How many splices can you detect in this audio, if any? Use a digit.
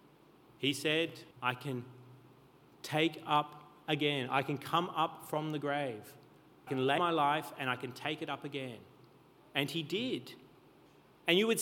3